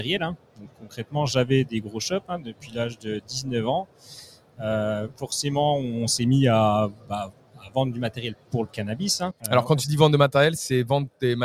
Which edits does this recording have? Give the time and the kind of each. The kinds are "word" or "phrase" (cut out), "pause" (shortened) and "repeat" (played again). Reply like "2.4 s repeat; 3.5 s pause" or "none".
9.4 s pause